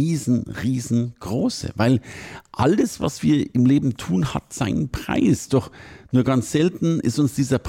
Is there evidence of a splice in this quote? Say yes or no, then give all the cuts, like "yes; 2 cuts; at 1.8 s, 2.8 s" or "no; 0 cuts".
no; 0 cuts